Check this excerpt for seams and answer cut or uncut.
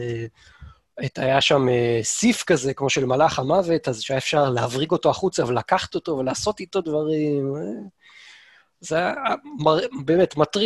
uncut